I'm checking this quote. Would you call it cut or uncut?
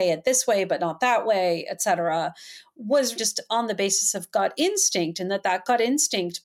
cut